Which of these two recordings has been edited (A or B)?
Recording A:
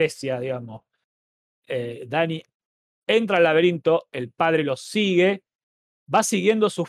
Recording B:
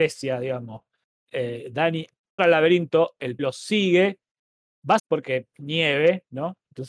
B